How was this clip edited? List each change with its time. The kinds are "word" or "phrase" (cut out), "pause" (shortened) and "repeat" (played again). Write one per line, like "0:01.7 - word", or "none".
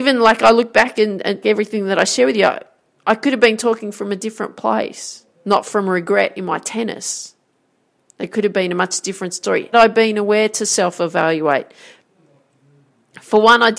0:01.4 - word
0:05.3 - pause
0:09.7 - phrase